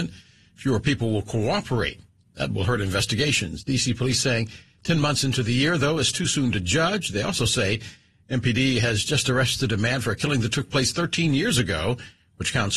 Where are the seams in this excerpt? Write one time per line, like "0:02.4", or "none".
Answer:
none